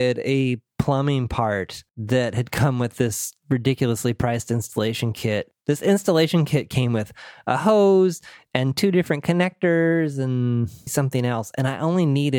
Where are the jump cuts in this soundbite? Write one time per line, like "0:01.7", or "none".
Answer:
0:01.9
0:05.6
0:10.9